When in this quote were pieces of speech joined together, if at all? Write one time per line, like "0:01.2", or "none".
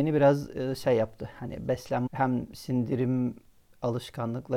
0:02.1